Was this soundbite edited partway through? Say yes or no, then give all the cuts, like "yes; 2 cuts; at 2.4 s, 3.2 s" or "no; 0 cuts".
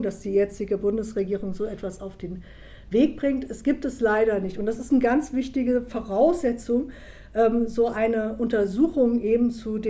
no; 0 cuts